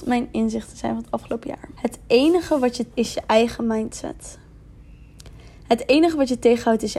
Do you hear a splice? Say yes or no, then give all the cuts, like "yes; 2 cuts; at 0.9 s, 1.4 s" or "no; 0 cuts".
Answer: yes; 2 cuts; at 1.7 s, 2.9 s